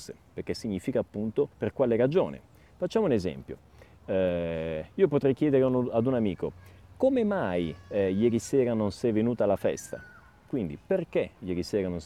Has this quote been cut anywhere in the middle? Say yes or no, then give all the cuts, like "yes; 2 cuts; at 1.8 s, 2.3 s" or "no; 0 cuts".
yes; 1 cut; at 1.5 s